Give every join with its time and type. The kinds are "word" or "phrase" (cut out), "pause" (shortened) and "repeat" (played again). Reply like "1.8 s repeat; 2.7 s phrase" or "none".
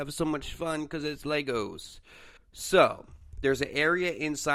2.4 s pause